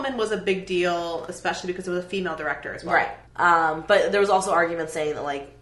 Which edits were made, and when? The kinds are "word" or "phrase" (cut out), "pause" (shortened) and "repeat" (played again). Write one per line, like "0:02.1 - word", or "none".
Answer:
0:03.3 - pause